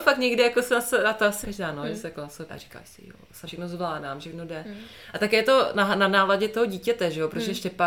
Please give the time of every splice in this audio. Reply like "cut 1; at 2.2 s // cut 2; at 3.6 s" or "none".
cut 1; at 1.4 s // cut 2; at 2.5 s // cut 3; at 3.5 s